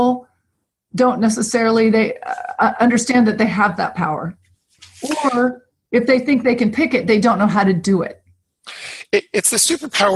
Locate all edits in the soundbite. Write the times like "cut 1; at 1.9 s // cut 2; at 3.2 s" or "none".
none